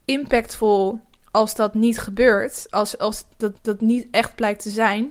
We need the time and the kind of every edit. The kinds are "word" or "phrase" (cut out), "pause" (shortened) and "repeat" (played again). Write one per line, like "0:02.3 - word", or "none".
0:03.5 - repeat